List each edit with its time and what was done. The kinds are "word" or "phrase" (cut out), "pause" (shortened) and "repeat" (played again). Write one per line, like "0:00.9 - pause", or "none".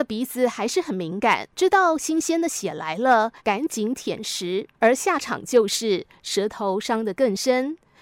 0:01.5 - pause
0:03.4 - pause
0:04.7 - pause

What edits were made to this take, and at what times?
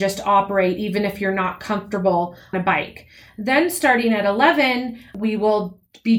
0:02.5 - word

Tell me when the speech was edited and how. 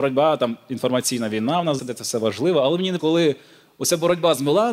0:01.8 - word
0:03.0 - word

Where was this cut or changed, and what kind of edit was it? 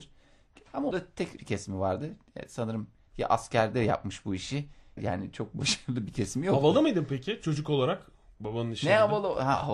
0:00.9 - word
0:01.4 - word
0:05.0 - word

